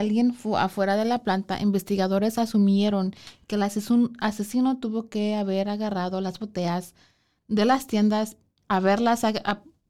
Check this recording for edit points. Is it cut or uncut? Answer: uncut